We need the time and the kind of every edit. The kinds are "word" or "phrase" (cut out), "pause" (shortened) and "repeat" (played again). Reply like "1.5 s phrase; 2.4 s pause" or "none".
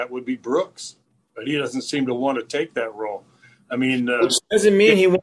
none

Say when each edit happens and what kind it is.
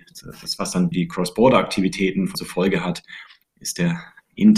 0.9 s word; 2.3 s word

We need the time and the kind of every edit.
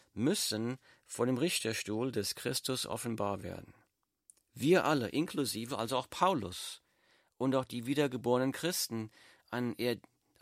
none

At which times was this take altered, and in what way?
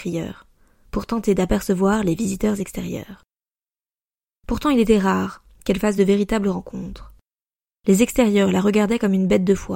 none

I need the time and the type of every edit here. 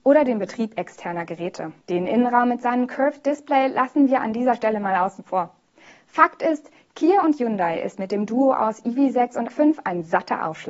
1.8 s pause; 9.5 s word

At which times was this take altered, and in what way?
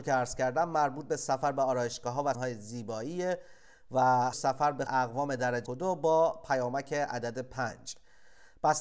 2.3 s word; 4.3 s word; 4.9 s word; 5.7 s word

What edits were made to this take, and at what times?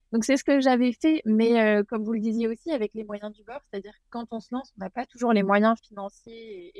none

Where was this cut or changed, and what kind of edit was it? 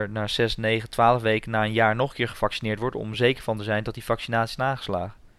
none

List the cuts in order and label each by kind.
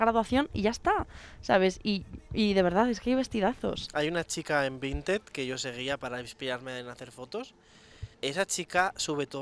8.1 s pause

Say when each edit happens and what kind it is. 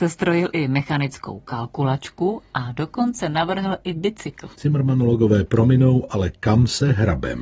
4.5 s pause

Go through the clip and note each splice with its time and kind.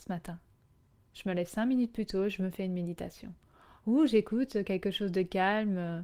none

